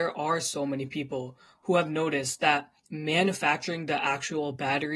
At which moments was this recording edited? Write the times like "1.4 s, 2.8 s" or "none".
2.8 s